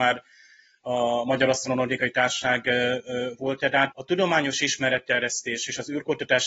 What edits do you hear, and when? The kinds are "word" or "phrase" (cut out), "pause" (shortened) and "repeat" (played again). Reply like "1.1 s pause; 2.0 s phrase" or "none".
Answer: 3.9 s word